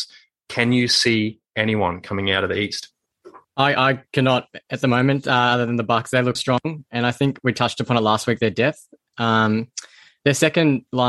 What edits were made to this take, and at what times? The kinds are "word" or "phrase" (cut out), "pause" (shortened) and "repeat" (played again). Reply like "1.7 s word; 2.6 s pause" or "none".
3.4 s pause; 6.4 s word